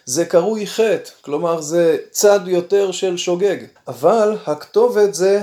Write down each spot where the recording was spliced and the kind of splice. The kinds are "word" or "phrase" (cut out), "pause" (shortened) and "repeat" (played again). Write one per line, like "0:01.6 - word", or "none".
0:03.8 - pause